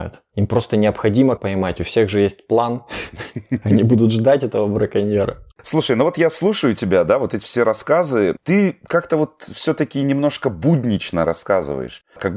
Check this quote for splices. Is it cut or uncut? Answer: cut